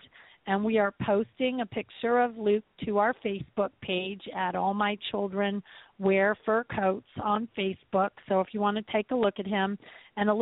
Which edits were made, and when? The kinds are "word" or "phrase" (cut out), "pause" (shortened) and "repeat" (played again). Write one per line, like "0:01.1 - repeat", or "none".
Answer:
none